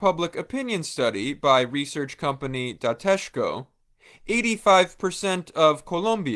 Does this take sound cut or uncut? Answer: uncut